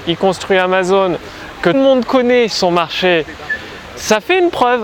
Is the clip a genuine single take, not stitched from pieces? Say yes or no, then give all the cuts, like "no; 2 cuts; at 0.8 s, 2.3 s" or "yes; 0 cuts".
no; 2 cuts; at 1.7 s, 2.5 s